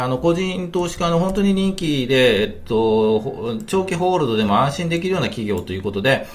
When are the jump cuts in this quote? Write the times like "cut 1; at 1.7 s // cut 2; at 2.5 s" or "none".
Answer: none